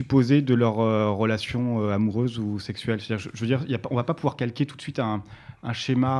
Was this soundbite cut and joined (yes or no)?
no